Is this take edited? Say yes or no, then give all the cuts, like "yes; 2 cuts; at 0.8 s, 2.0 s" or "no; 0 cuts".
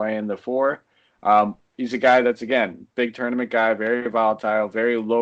no; 0 cuts